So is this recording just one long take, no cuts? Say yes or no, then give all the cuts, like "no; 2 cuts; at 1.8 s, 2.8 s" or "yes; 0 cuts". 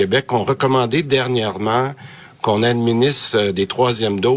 yes; 0 cuts